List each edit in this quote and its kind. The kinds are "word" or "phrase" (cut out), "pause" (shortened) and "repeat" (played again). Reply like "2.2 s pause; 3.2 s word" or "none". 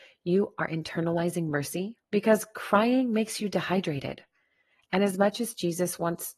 2.0 s pause